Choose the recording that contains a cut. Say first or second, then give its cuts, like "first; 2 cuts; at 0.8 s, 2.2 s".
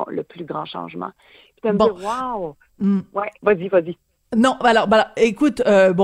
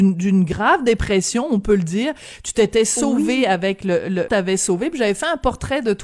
second; 1 cut; at 4.3 s